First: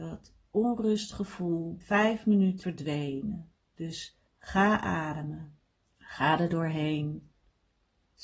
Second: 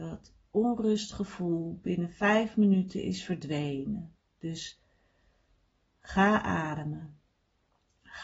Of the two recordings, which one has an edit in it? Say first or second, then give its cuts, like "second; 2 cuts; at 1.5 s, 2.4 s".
first; 4 cuts; at 1.8 s, 2.6 s, 4.3 s, 5.9 s